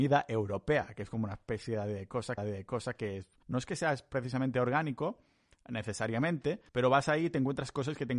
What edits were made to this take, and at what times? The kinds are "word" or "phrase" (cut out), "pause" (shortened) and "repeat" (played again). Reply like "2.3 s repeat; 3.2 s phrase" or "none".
2.4 s repeat; 3.4 s pause; 6.7 s pause

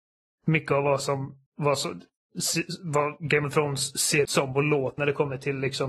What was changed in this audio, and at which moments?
1.5 s pause; 4.2 s word; 5.0 s word

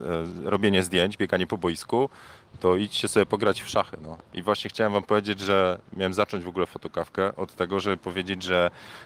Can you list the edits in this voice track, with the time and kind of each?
4.3 s pause

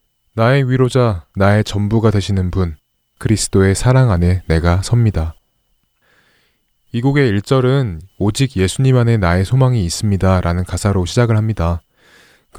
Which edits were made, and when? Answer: 1.3 s pause; 3.0 s pause

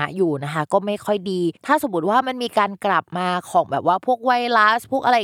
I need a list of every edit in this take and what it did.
1.6 s pause

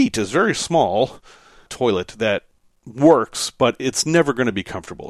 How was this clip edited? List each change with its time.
none

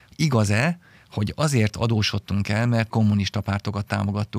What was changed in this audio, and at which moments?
2.9 s phrase

